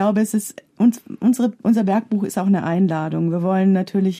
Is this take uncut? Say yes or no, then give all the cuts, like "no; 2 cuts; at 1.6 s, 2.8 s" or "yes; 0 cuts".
yes; 0 cuts